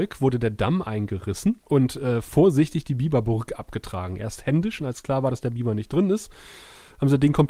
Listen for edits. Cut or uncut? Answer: cut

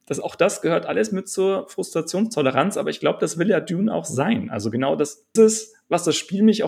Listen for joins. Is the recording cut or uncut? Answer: cut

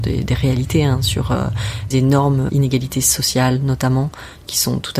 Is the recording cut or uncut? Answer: cut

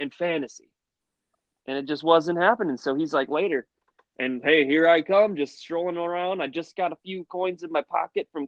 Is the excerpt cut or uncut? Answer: uncut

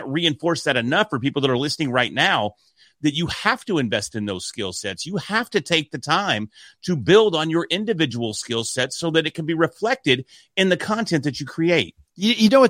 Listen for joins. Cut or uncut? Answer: uncut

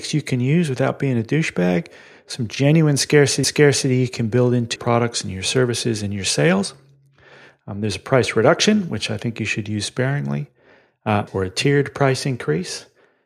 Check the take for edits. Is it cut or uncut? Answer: cut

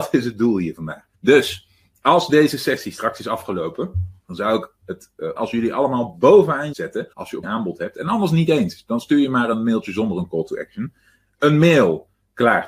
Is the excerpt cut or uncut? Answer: cut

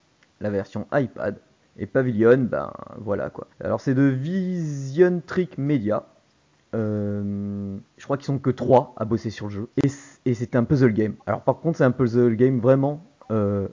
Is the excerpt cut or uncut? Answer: cut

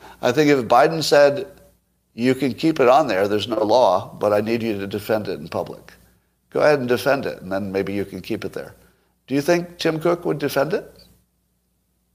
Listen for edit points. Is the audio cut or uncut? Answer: uncut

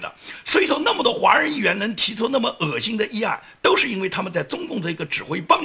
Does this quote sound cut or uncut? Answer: uncut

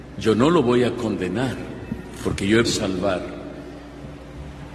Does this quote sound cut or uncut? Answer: cut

